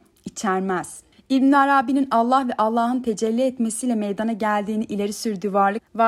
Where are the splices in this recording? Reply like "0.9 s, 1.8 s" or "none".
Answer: none